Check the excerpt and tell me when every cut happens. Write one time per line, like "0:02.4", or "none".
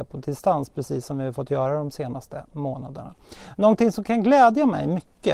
none